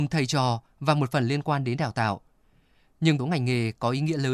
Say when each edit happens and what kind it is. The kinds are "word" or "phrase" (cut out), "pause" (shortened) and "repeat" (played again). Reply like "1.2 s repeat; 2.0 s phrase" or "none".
3.2 s phrase

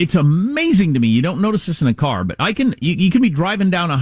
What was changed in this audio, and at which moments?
none

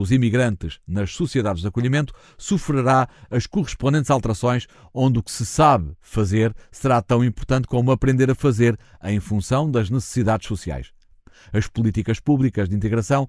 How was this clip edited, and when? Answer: none

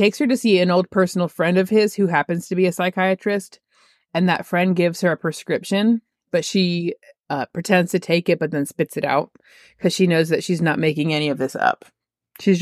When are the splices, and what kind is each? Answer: none

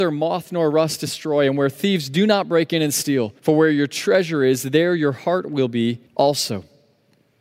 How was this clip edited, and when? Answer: 3.4 s pause; 6.1 s pause

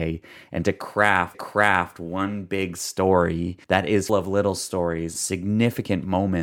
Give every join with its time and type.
1.3 s repeat; 3.6 s pause; 4.1 s word; 5.1 s word

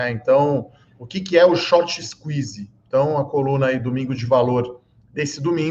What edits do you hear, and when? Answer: none

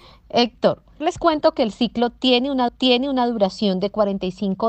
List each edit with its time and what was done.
1.0 s word; 2.7 s repeat

